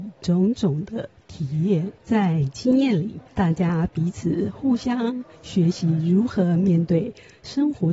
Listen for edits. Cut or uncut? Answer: cut